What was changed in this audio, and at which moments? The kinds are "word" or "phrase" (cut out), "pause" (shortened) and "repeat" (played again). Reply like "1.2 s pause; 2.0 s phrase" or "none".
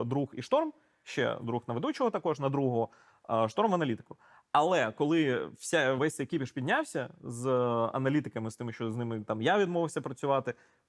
6.0 s word